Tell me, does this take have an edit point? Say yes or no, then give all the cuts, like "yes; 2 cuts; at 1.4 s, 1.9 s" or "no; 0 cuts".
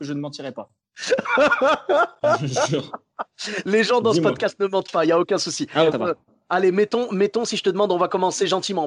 yes; 1 cut; at 5.9 s